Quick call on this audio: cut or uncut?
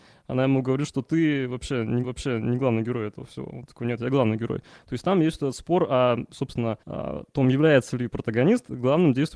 cut